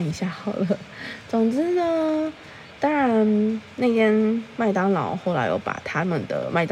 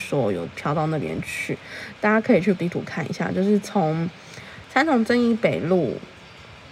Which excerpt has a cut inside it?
second; 1 cut; at 2.6 s

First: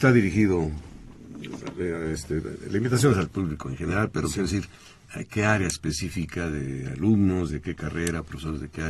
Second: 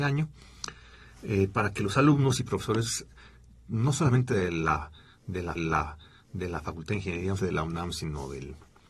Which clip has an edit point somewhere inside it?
second; 2 cuts; at 5.6 s, 7.4 s

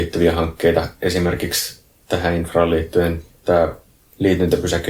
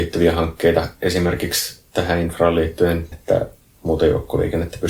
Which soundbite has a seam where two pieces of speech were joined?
second; 2 cuts; at 1.9 s, 3.1 s

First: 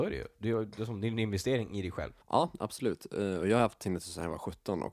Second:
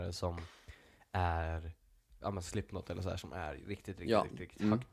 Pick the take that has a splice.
first; 1 cut; at 2.2 s

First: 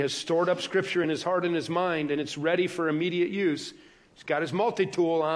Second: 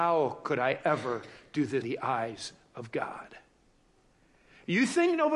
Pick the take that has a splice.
second; 1 cut; at 1.8 s

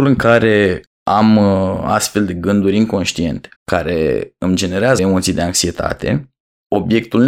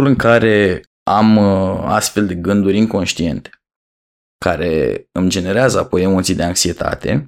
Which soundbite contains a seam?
first; 2 cuts; at 3.6 s, 5.0 s

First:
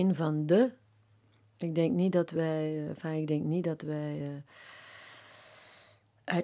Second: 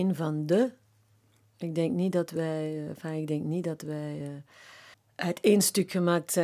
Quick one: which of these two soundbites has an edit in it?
second; 1 cut; at 4.9 s

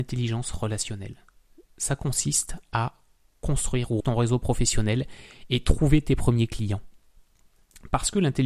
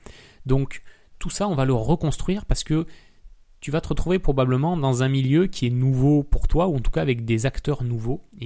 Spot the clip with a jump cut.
first; 1 cut; at 4.0 s

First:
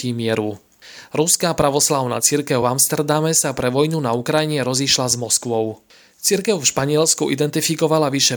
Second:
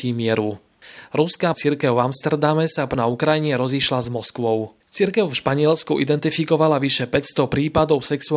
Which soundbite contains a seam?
second; 3 cuts; at 1.5 s, 2.9 s, 4.8 s

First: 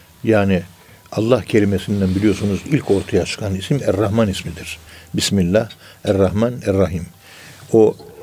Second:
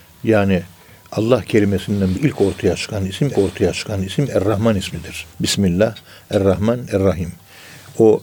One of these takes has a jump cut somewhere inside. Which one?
second; 3 cuts; at 2.1 s, 3.3 s, 5.3 s

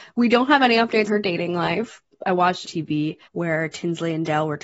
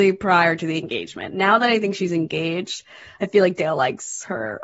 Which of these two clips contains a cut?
first; 3 cuts; at 1.1 s, 2.6 s, 3.3 s

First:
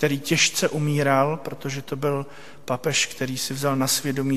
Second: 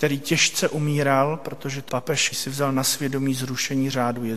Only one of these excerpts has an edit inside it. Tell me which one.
second; 2 cuts; at 1.9 s, 2.3 s

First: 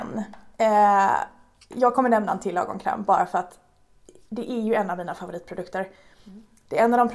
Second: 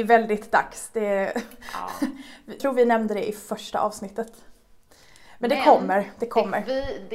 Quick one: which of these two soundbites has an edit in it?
second; 1 cut; at 2.6 s

